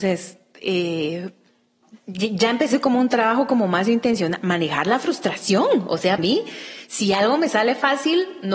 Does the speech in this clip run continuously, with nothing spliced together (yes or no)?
no